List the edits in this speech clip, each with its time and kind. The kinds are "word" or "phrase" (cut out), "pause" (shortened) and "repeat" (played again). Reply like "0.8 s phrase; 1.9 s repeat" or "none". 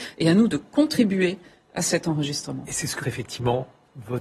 3.0 s word